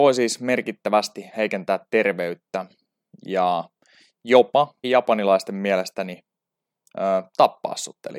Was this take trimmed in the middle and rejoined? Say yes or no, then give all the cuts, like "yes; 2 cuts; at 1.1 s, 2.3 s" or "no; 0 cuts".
yes; 1 cut; at 4.8 s